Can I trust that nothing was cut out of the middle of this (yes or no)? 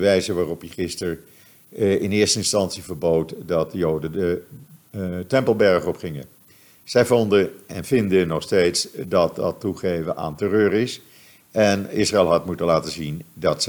yes